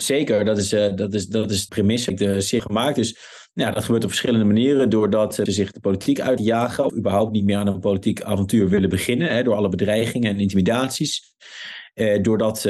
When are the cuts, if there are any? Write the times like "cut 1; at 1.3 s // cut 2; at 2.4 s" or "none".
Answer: cut 1; at 1.7 s // cut 2; at 2.1 s // cut 3; at 2.6 s // cut 4; at 5.5 s // cut 5; at 6.4 s // cut 6; at 6.9 s